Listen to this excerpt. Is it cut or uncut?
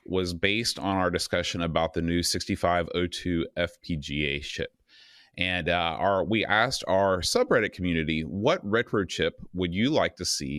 uncut